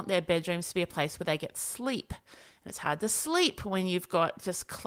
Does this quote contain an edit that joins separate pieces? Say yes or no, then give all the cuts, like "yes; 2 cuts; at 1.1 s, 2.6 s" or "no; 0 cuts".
no; 0 cuts